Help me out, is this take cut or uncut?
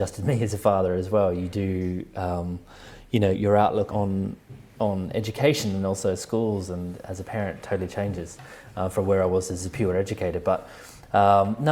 cut